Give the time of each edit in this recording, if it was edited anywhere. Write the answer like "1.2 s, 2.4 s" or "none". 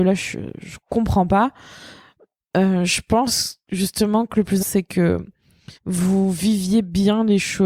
4.6 s, 5.7 s